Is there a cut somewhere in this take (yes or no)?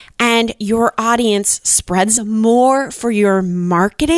yes